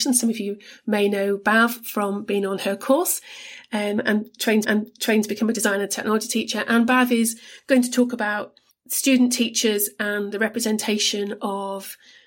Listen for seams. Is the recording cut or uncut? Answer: cut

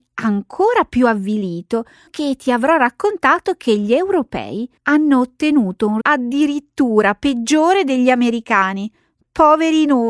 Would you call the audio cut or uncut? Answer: cut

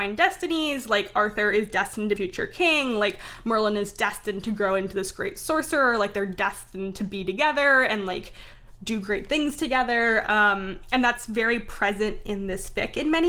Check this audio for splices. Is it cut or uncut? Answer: cut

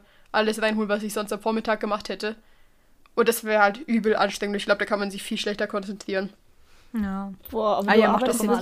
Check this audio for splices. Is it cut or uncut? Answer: uncut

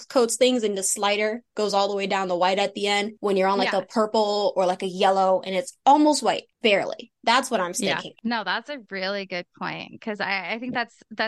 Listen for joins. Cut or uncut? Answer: cut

